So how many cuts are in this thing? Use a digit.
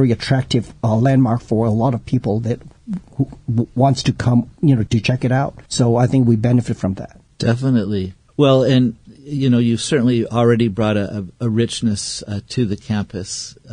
2